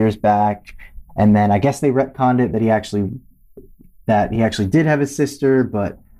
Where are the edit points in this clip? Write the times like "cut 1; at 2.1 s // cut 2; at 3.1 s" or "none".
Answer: none